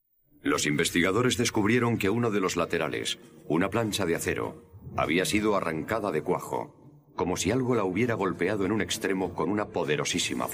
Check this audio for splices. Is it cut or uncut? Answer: uncut